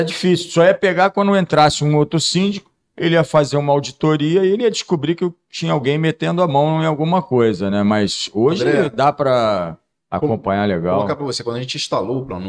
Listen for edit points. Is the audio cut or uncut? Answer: uncut